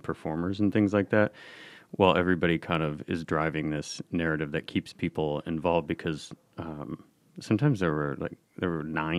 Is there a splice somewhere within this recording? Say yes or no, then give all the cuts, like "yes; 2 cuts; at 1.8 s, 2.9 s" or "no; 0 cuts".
no; 0 cuts